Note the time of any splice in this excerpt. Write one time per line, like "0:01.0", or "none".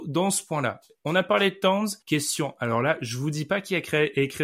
0:02.0